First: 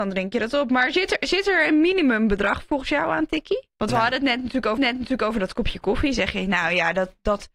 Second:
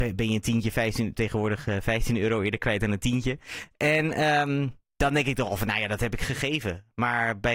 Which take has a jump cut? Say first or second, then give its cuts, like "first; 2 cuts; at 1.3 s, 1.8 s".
first; 2 cuts; at 3.7 s, 4.8 s